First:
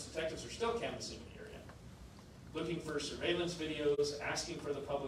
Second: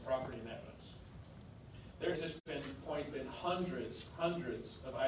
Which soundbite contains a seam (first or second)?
second